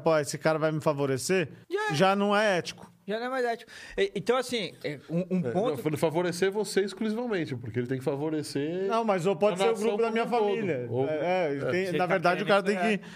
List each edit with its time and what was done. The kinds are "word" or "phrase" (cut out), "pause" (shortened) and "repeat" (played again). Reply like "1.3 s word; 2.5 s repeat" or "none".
1.6 s pause